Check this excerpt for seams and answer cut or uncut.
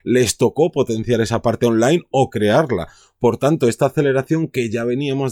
uncut